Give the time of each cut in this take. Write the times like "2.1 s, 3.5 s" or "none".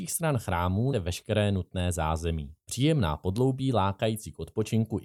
0.9 s, 2.6 s